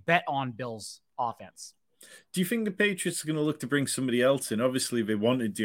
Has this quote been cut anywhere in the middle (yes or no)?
no